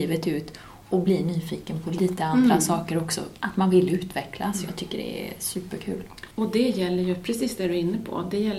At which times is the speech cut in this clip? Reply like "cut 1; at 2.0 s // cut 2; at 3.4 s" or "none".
cut 1; at 6.3 s